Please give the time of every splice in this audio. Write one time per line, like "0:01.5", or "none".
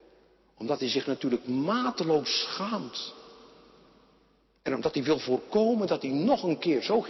none

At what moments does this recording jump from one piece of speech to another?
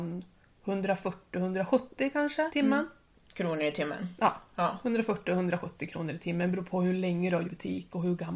0:02.5
0:03.1
0:07.4

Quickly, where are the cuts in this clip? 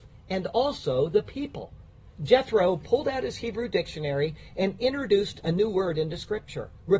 none

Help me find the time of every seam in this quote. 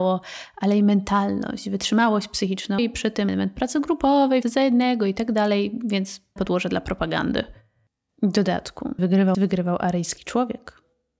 0:02.8
0:03.3
0:04.4
0:06.4
0:09.0
0:09.3

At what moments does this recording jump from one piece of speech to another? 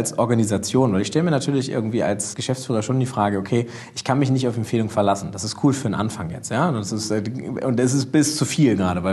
0:02.3

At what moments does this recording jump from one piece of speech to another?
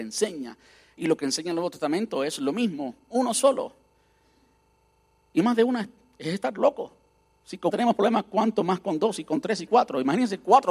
0:07.7
0:09.7

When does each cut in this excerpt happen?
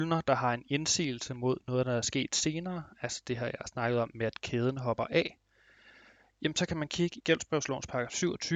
0:07.2

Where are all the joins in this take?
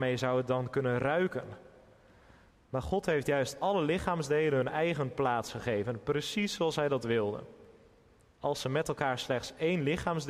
none

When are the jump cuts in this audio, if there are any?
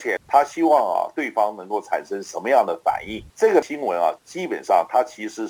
0:03.3

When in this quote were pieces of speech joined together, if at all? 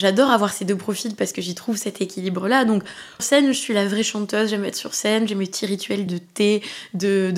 0:03.2
0:06.1

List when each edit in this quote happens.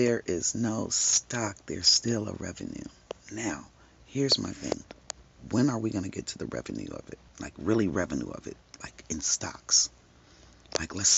0:07.3

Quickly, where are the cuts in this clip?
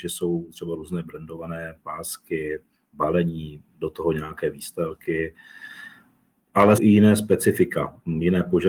0:06.8

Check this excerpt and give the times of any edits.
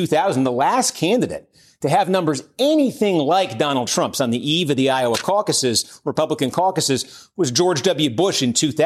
none

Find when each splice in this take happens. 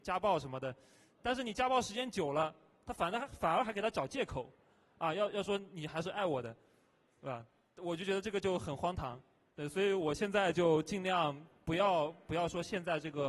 none

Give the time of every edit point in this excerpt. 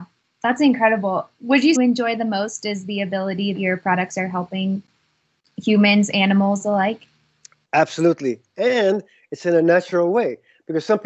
0:01.8
0:03.6

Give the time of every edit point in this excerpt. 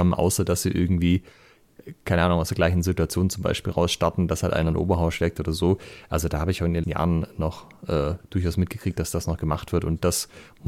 0:06.8

